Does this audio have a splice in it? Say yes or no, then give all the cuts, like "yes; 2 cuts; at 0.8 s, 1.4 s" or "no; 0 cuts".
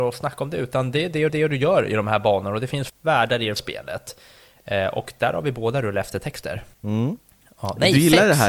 yes; 4 cuts; at 1.3 s, 2.9 s, 3.6 s, 6.7 s